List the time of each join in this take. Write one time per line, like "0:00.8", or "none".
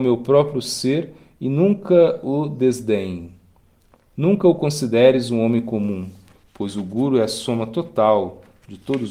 none